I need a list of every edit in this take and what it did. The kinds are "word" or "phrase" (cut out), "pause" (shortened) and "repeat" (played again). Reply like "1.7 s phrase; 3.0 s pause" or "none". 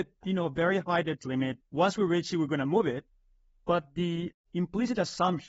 1.6 s word